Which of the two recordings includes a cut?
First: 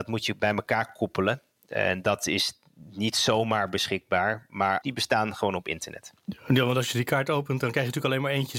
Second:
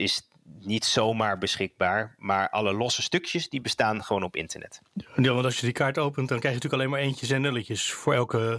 first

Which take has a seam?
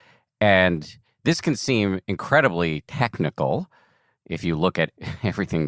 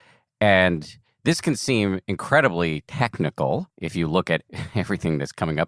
second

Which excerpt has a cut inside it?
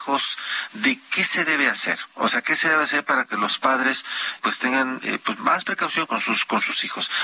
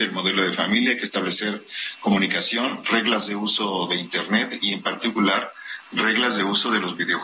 first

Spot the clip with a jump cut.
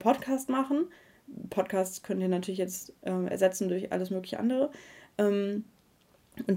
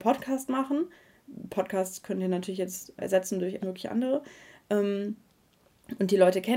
second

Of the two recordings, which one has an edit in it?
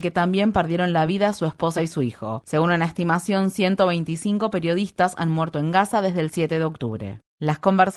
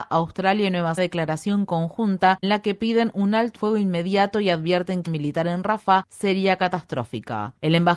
second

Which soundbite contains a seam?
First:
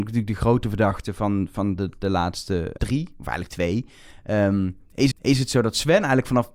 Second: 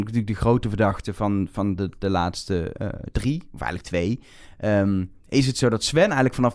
first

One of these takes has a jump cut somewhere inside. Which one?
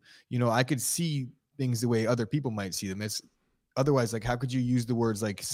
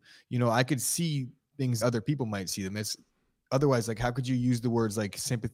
second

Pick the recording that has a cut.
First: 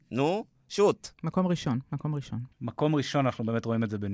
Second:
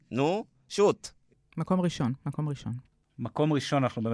first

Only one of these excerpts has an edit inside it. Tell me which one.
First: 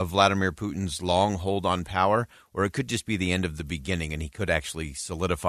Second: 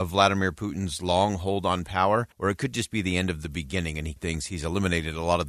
second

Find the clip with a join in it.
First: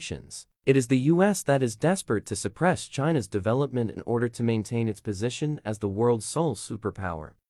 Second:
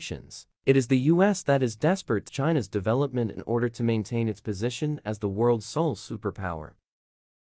second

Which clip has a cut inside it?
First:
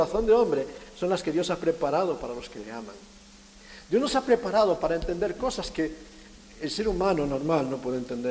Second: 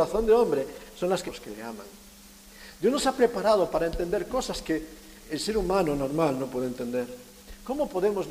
second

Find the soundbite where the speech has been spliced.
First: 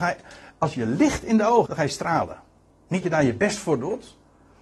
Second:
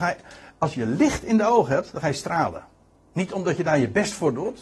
first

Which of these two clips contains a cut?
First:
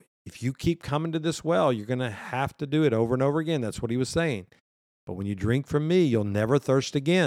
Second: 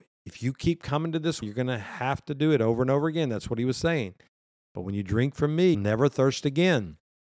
second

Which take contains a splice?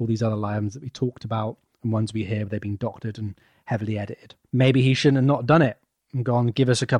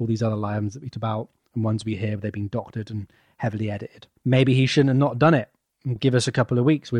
second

